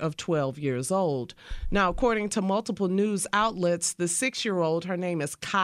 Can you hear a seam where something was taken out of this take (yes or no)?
no